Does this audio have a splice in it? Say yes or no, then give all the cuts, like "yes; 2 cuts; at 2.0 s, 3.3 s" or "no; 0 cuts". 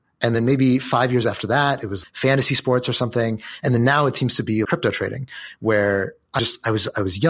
yes; 3 cuts; at 2.0 s, 4.6 s, 6.4 s